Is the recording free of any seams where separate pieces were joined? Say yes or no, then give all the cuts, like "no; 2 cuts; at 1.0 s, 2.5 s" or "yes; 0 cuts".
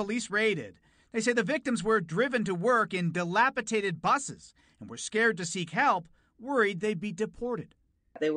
yes; 0 cuts